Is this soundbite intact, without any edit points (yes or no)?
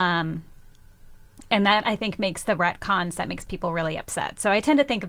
yes